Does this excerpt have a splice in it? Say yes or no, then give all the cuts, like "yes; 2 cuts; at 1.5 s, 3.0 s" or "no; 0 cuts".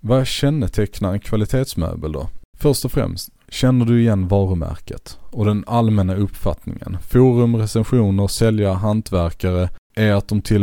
yes; 1 cut; at 3.4 s